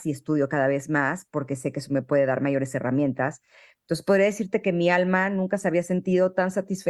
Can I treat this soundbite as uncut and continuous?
yes; 0 cuts

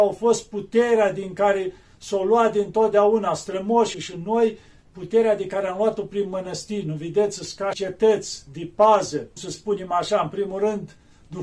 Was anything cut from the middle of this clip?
yes; 3 cuts; at 3.9 s, 7.7 s, 9.4 s

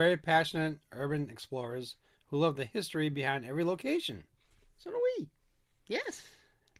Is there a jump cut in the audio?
no; 0 cuts

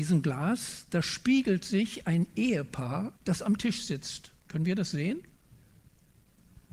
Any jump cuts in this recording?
yes; 2 cuts; at 3.2 s, 4.4 s

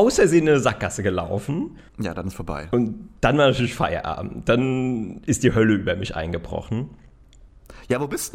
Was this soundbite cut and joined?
yes; 2 cuts; at 1.9 s, 3.2 s

